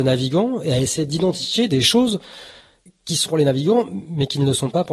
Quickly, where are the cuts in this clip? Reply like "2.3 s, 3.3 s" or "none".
2.9 s, 3.3 s

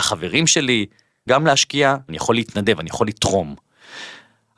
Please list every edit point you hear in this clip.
1.3 s, 2.1 s

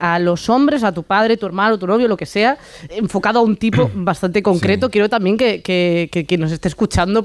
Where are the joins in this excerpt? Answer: 2.9 s, 6.1 s

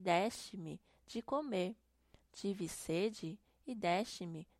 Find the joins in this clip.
none

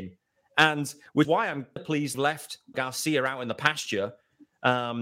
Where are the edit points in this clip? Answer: 1.2 s, 1.8 s, 2.1 s, 2.7 s

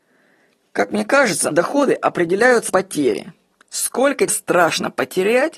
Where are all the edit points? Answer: 1.5 s, 2.7 s, 4.3 s

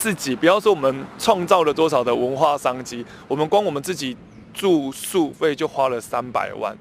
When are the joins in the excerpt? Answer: 4.5 s

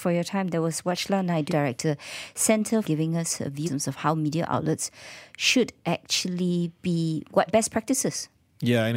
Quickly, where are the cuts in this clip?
1.5 s, 2.8 s, 3.7 s, 7.5 s

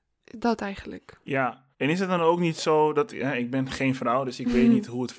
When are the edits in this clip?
1.7 s

